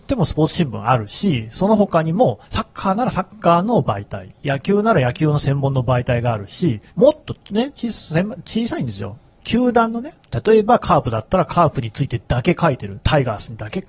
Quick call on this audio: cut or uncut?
cut